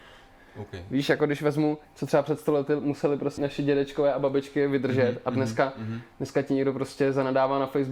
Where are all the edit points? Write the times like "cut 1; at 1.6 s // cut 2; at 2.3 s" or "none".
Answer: cut 1; at 1.8 s // cut 2; at 3.4 s